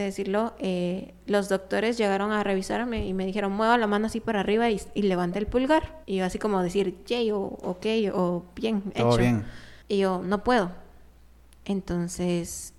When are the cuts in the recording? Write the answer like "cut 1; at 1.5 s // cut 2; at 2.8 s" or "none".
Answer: cut 1; at 6.0 s // cut 2; at 9.8 s